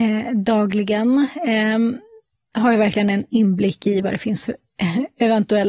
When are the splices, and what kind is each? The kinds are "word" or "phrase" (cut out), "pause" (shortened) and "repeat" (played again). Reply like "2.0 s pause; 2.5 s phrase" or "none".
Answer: none